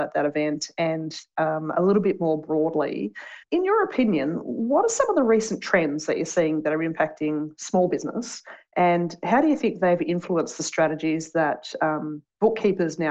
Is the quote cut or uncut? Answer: cut